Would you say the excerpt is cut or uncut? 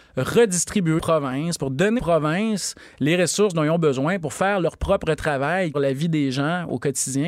cut